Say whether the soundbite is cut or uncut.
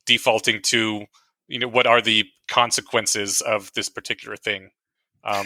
uncut